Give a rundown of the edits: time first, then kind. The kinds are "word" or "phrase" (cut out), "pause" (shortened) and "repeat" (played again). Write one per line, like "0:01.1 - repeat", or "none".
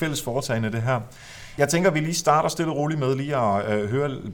none

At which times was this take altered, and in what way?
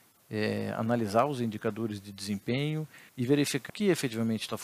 0:03.1 - pause
0:03.7 - word

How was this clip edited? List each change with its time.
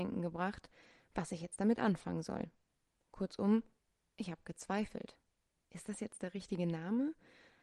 none

